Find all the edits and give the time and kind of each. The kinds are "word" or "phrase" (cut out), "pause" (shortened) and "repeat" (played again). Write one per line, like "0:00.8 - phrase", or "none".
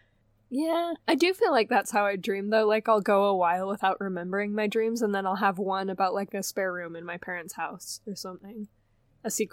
0:01.0 - pause